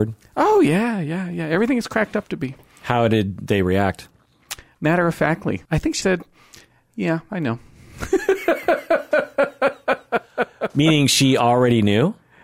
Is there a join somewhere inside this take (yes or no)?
yes